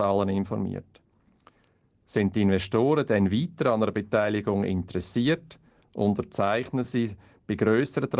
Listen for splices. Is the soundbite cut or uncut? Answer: uncut